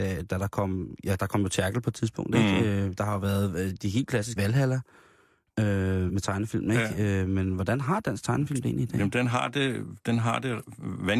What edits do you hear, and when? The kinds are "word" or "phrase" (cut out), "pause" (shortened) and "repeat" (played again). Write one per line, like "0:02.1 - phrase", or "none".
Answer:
0:04.4 - word
0:06.1 - word